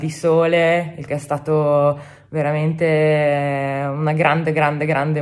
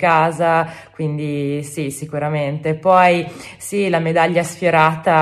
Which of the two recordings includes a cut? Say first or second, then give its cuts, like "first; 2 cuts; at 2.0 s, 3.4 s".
first; 1 cut; at 1.1 s